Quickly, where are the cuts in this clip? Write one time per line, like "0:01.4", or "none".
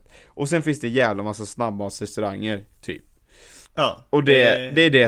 0:03.6